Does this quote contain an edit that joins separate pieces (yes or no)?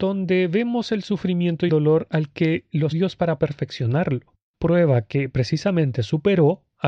yes